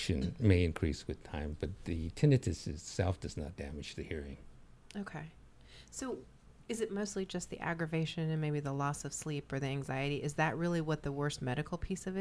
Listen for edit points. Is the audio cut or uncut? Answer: uncut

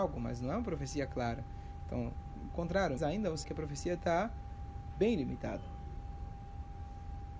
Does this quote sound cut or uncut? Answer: cut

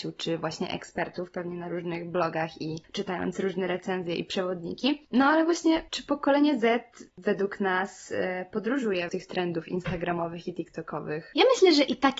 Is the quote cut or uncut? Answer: cut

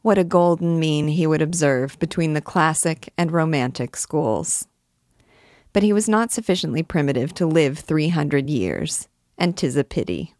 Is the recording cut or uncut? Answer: uncut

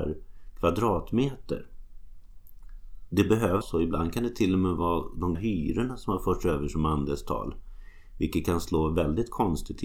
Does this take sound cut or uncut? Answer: cut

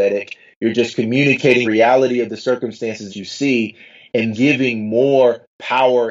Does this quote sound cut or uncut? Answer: cut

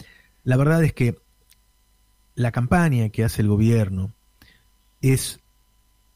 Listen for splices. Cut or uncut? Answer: uncut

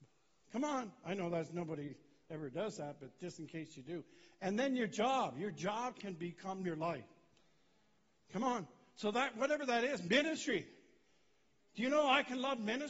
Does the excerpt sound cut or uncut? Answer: uncut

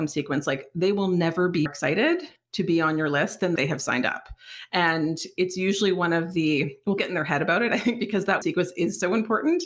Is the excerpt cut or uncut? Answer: cut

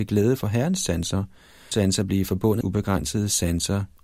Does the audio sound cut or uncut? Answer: cut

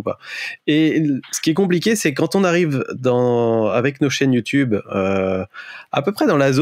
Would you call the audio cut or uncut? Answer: uncut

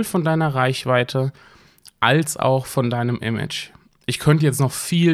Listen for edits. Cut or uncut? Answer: uncut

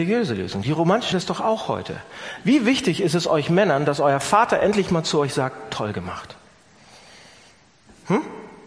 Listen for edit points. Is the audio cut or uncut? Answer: cut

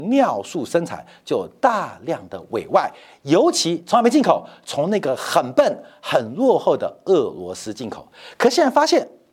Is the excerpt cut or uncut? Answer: uncut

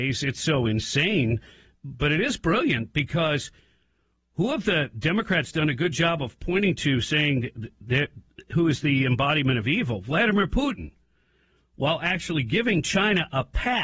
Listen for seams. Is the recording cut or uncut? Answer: uncut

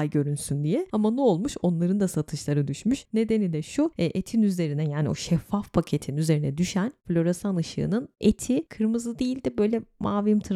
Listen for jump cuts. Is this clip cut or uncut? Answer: uncut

